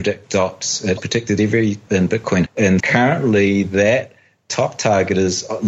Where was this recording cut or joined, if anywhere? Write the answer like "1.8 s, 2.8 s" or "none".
1.0 s, 1.9 s, 2.5 s, 2.8 s